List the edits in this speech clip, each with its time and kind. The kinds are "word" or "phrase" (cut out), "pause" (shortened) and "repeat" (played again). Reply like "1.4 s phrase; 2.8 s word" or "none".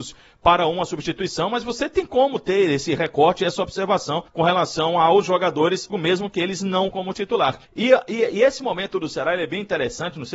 4.3 s pause; 5.9 s phrase; 6.9 s word; 7.6 s pause